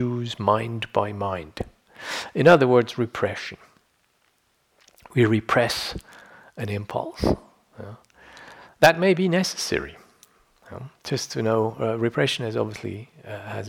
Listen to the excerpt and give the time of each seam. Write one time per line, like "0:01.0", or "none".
none